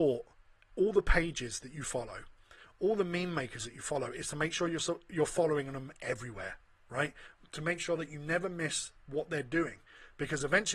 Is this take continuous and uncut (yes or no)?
yes